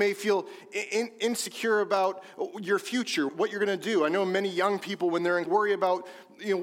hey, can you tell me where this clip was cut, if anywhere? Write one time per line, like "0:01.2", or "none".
0:03.3
0:05.5